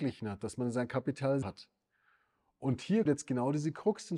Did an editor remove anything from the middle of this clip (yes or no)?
yes